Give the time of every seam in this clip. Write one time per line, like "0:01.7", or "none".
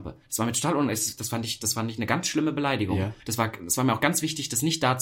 0:03.2